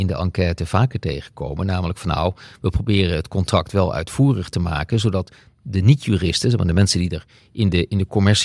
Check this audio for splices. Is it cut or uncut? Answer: uncut